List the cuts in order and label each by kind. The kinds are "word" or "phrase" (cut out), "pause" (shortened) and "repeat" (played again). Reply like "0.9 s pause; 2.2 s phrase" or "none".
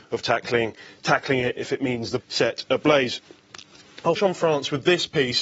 1.6 s word; 2.2 s word; 4.2 s word